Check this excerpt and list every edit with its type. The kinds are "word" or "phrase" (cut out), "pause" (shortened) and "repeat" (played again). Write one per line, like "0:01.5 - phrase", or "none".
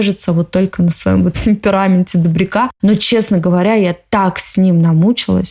0:01.3 - word